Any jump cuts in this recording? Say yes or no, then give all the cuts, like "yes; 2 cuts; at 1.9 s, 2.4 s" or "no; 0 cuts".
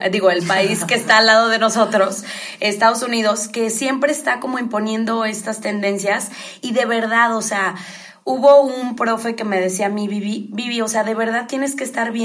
no; 0 cuts